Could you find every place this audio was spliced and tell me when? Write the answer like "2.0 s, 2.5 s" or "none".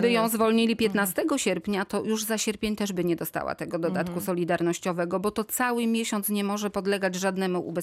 none